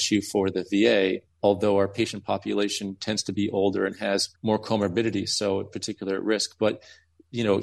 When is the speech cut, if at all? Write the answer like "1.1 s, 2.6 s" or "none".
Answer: 4.4 s